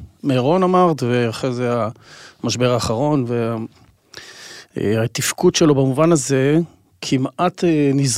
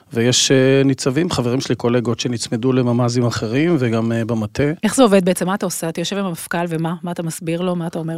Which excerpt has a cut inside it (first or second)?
second